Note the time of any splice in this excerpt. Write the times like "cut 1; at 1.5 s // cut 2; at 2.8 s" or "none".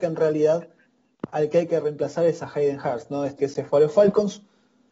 cut 1; at 3.4 s